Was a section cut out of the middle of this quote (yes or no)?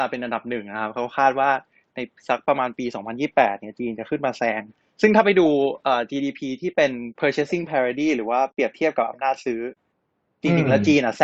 yes